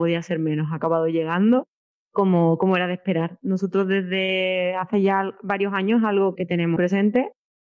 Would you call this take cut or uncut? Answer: cut